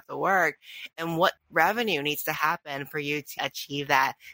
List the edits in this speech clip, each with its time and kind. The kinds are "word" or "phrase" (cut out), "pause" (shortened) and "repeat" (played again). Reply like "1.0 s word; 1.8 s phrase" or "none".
3.4 s word